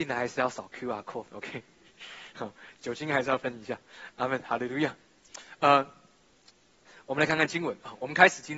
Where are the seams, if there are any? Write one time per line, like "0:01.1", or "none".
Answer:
none

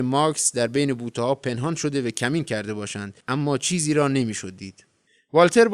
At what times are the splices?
0:03.2

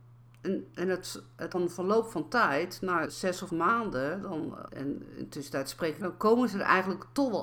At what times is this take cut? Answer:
0:01.5
0:03.0
0:03.5
0:04.7
0:06.0

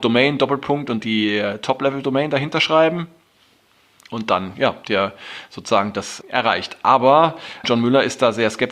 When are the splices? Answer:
0:01.0
0:04.8
0:06.2
0:07.6

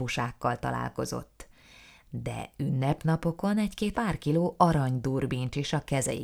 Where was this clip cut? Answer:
0:03.9

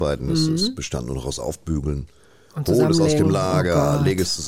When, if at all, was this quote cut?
none

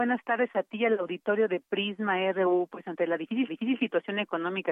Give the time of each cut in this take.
0:03.5

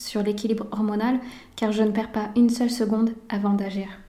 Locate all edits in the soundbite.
none

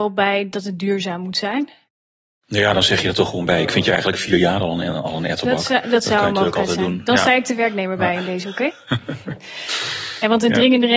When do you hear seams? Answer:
none

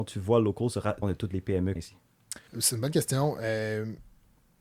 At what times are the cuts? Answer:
0:01.0
0:01.8
0:02.5

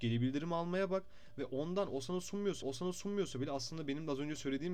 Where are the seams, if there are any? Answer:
0:02.6

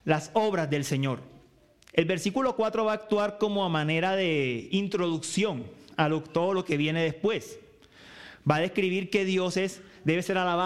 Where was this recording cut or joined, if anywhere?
none

